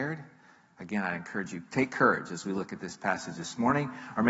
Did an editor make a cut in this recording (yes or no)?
no